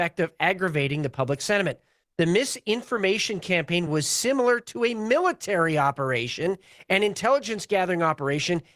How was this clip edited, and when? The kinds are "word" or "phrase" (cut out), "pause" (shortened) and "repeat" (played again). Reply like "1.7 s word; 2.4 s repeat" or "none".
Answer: none